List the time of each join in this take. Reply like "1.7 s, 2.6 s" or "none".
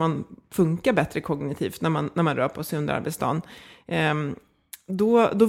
none